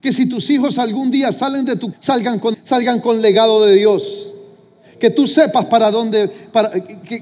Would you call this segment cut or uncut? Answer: cut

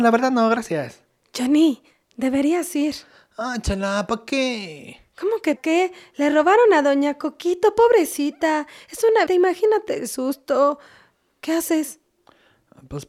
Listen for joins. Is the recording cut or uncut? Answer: cut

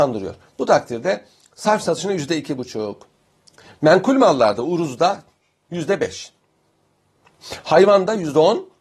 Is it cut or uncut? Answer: uncut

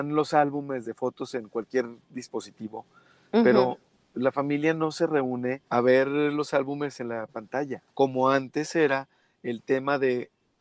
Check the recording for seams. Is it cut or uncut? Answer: cut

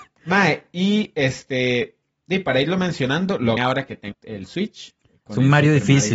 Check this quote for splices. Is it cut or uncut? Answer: cut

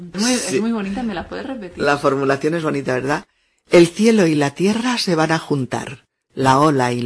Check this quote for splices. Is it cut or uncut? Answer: uncut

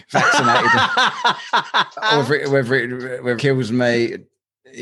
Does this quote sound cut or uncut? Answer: cut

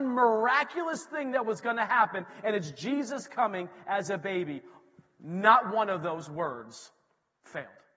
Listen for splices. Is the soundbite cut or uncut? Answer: uncut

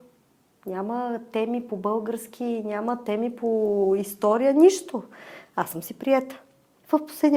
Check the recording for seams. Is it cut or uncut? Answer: uncut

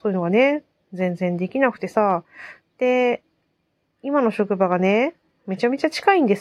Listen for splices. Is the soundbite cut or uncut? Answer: uncut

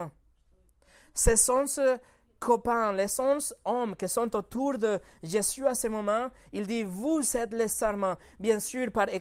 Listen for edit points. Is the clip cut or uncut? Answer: uncut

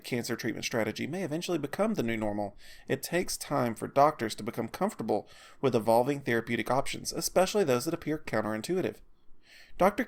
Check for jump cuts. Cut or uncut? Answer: uncut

